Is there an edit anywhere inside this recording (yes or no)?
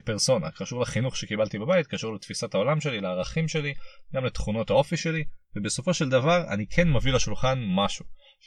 no